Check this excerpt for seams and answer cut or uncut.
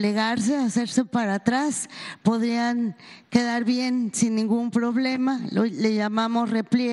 uncut